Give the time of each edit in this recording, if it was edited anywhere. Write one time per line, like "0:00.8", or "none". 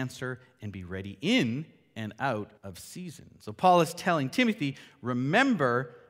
0:02.6